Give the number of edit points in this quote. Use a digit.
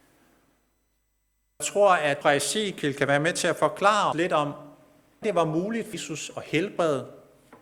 5